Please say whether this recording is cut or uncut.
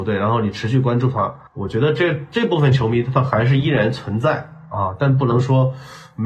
cut